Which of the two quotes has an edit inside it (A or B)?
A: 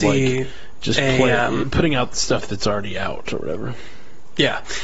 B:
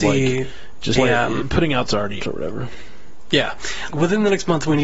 B